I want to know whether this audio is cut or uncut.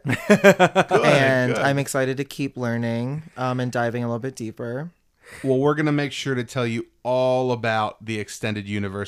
uncut